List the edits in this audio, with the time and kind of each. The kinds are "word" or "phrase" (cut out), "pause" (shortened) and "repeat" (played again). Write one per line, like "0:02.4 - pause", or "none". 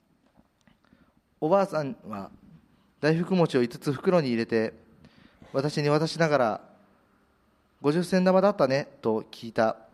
none